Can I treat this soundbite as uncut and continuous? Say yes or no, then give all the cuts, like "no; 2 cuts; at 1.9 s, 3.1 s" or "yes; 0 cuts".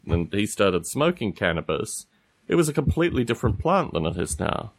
yes; 0 cuts